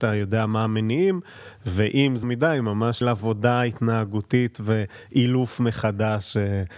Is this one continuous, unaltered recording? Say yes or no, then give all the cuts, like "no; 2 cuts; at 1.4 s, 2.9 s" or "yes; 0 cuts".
no; 2 cuts; at 2.2 s, 3.0 s